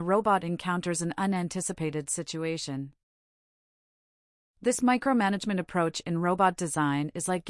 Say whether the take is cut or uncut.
uncut